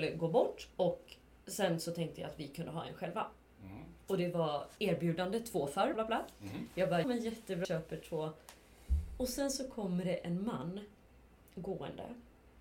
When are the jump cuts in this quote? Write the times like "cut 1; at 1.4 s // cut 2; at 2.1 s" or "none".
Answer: cut 1; at 4.8 s // cut 2; at 5.9 s // cut 3; at 7.0 s // cut 4; at 7.6 s